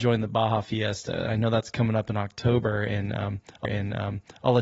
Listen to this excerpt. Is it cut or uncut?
cut